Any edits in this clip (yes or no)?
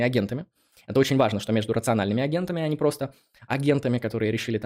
no